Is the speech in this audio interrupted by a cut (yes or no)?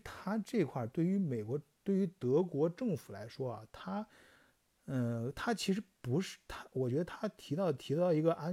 no